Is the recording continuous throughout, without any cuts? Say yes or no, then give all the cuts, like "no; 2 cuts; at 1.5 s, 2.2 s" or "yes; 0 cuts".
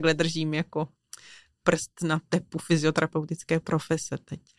yes; 0 cuts